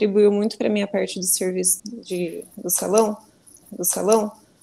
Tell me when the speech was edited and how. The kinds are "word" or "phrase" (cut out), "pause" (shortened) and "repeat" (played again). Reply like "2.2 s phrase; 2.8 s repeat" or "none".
1.8 s word; 3.6 s repeat